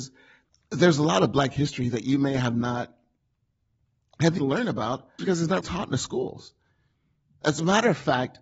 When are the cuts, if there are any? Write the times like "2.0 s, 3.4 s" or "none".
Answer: 4.4 s, 5.2 s, 5.6 s

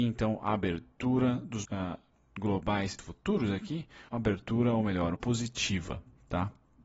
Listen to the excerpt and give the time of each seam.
1.6 s, 3.0 s, 4.1 s, 5.1 s

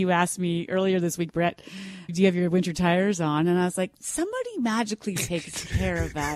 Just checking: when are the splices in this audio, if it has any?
2.1 s

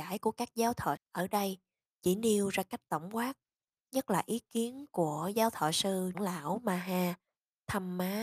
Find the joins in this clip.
1.0 s, 6.1 s

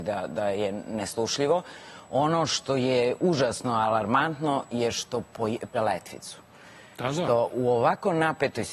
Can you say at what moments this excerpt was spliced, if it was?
5.7 s

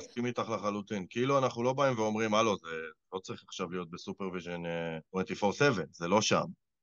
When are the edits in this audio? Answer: 5.0 s

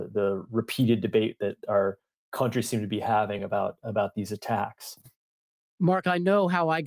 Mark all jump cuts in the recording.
none

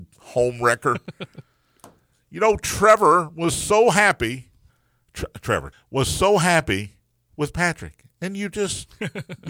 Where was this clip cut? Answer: 4.7 s, 5.7 s

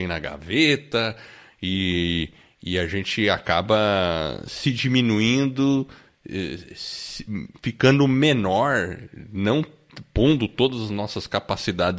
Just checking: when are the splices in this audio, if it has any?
none

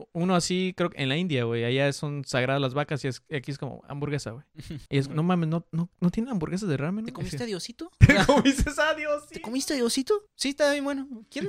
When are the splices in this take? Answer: 4.9 s, 10.3 s

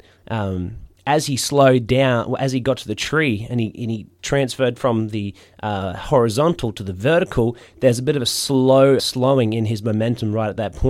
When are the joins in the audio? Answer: 9.0 s

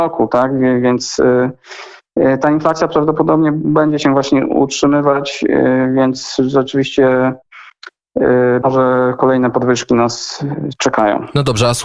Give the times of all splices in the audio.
8.6 s

